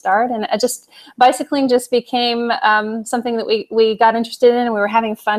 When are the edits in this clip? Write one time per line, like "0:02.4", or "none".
none